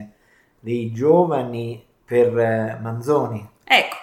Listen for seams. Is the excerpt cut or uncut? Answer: uncut